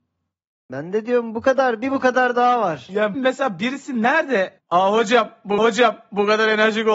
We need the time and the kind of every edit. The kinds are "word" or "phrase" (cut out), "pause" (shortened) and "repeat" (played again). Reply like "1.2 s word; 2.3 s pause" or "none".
3.1 s word; 4.6 s word; 5.6 s repeat